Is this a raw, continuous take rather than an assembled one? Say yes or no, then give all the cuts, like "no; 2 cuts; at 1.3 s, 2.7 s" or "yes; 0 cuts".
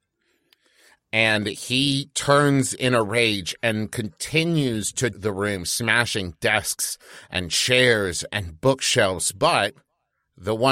no; 1 cut; at 5.1 s